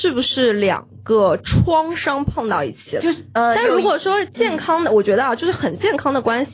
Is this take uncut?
no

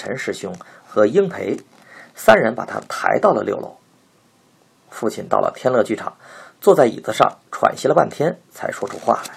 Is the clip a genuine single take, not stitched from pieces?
yes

